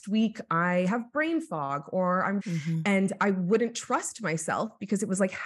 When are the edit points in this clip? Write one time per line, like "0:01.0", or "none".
0:02.4